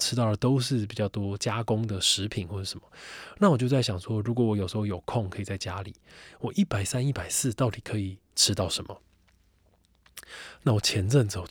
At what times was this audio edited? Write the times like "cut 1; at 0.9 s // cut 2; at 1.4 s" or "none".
cut 1; at 8.3 s